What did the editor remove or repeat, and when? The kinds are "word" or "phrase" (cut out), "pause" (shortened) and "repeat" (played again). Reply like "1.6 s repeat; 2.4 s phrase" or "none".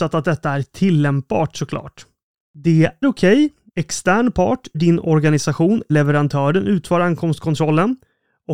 3.0 s word; 3.7 s word; 4.7 s word; 5.9 s word